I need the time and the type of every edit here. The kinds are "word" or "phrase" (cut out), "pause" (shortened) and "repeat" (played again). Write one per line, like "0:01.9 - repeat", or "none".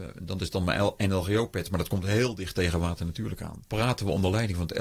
none

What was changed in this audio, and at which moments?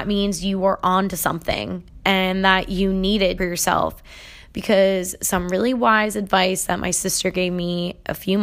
0:03.4 - phrase

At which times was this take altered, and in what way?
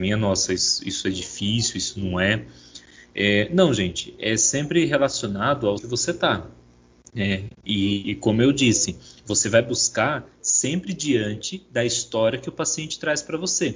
0:05.8 - word
0:08.0 - word

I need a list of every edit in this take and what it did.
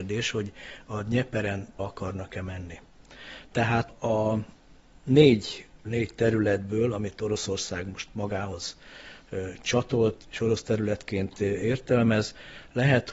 0:01.8 - word
0:03.9 - word
0:05.8 - word
0:10.2 - word

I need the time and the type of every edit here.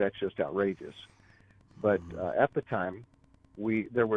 none

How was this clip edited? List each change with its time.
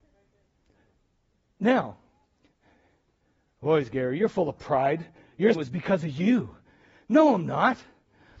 0:05.5 - word

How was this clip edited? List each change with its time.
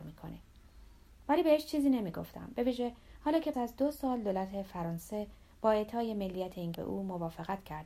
0:03.5 - word
0:06.7 - word

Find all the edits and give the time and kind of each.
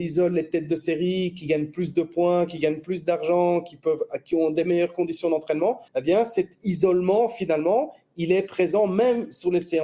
0:05.9 - pause

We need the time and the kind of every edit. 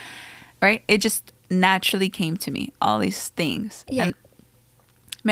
0:04.1 - word

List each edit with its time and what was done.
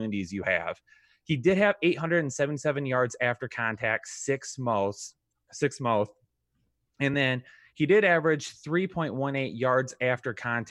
none

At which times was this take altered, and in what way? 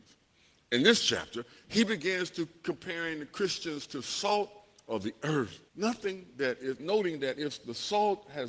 0:05.7 - pause
0:06.8 - word

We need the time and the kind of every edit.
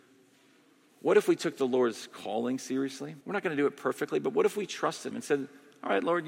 0:03.2 - pause
0:05.1 - word

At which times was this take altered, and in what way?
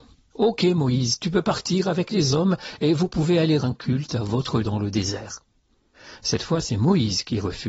0:03.6 - word
0:04.6 - word

